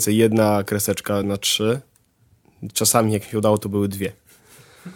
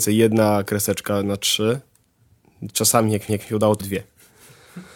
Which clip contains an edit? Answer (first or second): second